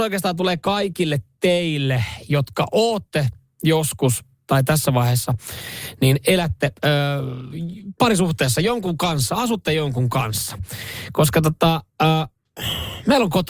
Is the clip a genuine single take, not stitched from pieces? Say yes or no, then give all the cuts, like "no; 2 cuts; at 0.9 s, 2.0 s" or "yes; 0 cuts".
yes; 0 cuts